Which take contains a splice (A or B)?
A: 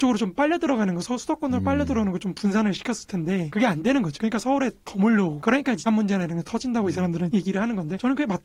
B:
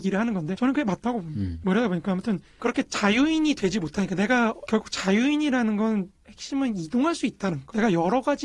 A